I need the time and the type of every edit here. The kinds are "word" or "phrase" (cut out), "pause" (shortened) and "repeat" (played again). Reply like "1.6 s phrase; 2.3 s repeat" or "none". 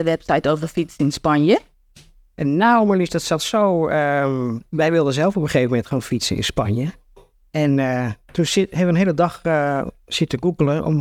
none